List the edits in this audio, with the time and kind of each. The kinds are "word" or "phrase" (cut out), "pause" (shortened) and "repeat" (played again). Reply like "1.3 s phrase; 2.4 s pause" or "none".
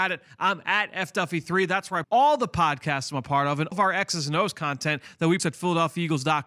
2.0 s word; 3.7 s word; 5.4 s word